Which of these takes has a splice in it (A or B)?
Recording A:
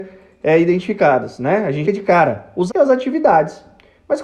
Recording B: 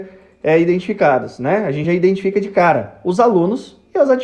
A